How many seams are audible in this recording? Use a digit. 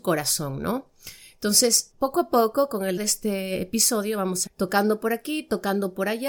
3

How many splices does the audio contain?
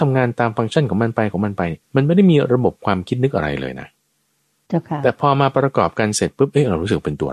1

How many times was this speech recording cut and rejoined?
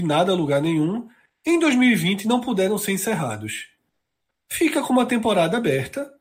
0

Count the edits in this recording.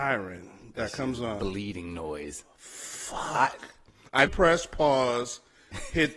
1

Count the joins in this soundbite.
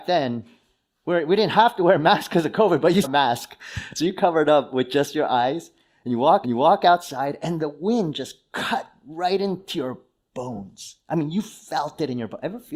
2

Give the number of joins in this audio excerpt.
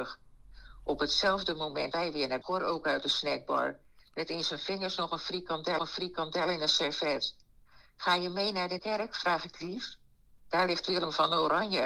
4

